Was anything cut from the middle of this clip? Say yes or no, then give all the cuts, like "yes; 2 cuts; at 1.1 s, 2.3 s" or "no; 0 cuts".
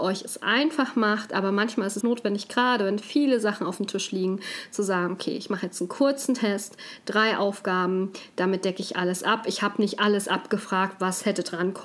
yes; 1 cut; at 2.0 s